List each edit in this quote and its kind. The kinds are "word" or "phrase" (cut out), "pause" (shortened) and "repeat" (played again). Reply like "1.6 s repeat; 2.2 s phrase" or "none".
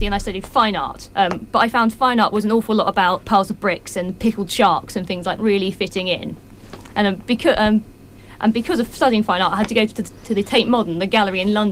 1.1 s pause; 3.2 s word; 5.4 s phrase

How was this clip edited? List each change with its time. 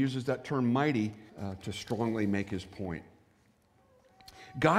1.3 s pause

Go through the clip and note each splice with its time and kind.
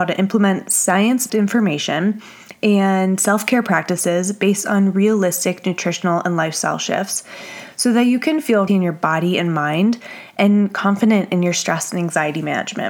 1.3 s word; 8.7 s phrase

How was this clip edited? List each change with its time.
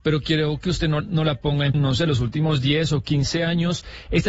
1.0 s word; 1.7 s phrase

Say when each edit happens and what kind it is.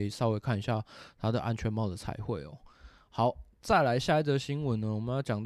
3.5 s pause

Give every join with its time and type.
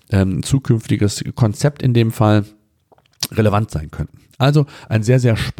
none

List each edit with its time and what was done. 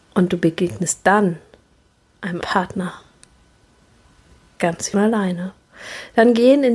2.4 s word; 4.9 s word

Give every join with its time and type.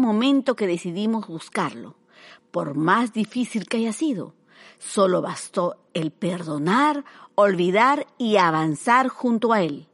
none

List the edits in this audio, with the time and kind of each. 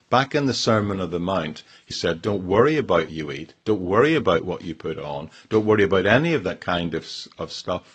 1.9 s word; 3.1 s word

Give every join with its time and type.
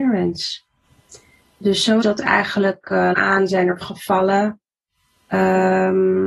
2.0 s word; 3.1 s word; 3.8 s word

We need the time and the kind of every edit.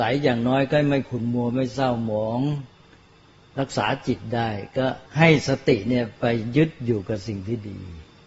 5.1 s pause

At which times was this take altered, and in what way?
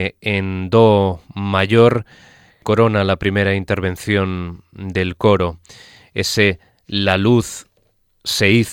none

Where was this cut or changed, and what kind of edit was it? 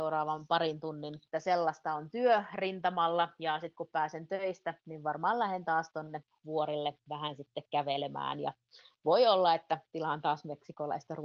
1.3 s phrase

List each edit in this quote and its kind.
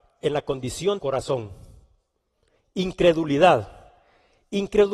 1.0 s word

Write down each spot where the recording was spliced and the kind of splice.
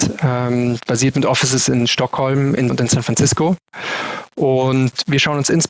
2.7 s word

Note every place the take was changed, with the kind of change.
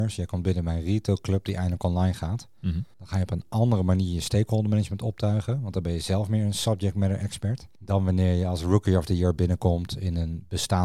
2.9 s pause; 7.8 s pause

